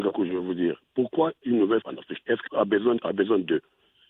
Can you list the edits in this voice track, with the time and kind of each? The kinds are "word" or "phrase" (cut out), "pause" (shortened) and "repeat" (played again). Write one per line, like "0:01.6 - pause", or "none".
0:01.8 - word
0:02.5 - word